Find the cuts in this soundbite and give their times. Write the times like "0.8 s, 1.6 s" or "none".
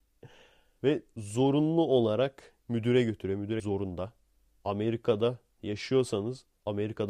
3.6 s